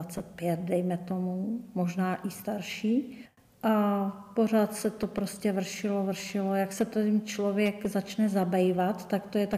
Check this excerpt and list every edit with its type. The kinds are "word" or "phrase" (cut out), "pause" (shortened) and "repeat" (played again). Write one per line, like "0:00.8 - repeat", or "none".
none